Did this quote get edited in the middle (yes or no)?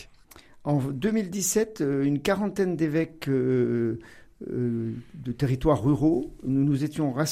no